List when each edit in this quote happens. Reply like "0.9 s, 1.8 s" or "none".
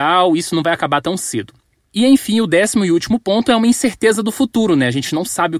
none